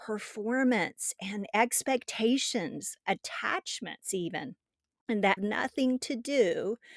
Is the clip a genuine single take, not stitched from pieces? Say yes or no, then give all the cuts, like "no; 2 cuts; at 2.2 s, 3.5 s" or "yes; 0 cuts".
no; 1 cut; at 5.4 s